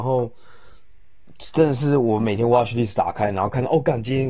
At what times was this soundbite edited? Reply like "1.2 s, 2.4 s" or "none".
none